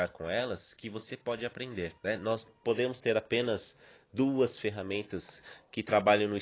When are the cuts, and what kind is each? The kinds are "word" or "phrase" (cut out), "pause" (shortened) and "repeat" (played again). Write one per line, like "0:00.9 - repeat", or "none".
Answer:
0:02.0 - pause
0:02.5 - word